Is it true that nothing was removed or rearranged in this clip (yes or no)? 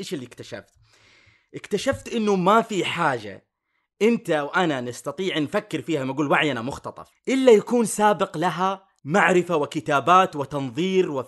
yes